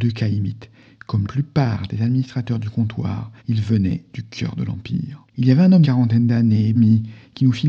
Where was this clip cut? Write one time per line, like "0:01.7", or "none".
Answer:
0:01.2
0:03.4
0:05.3
0:05.8
0:06.7